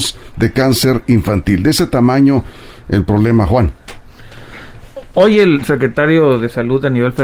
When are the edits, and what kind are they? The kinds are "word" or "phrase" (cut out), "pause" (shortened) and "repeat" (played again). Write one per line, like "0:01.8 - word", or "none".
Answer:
none